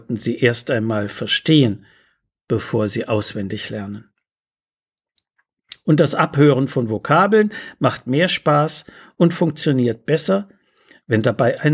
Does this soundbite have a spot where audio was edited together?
no; 0 cuts

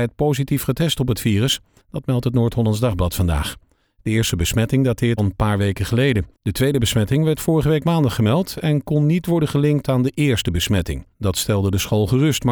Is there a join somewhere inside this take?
yes; 4 cuts; at 1.8 s, 5.2 s, 6.3 s, 11.1 s

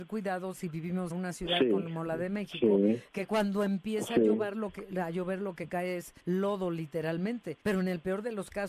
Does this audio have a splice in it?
yes; 3 cuts; at 1.1 s, 6.2 s, 7.6 s

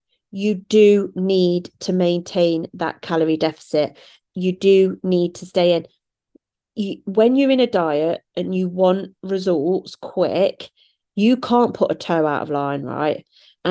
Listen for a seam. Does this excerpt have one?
no; 0 cuts

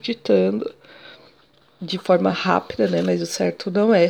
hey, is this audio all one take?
yes; 0 cuts

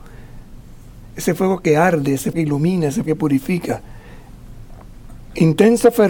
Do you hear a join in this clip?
yes; 2 cuts; at 2.3 s, 3.1 s

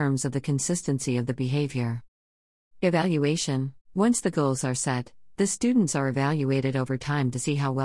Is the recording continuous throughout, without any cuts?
no; 1 cut; at 3.8 s

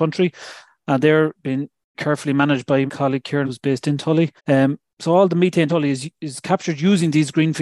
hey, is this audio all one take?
no; 5 cuts; at 1.9 s, 2.9 s, 3.5 s, 4.4 s, 5.7 s

